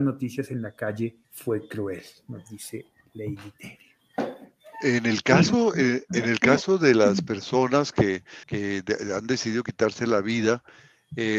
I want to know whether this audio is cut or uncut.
cut